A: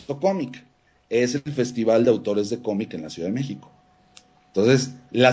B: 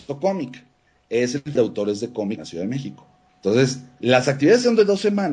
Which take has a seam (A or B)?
B